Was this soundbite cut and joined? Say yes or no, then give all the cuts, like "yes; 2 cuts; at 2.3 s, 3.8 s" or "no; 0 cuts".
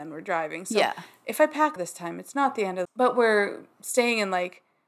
yes; 2 cuts; at 1.8 s, 2.8 s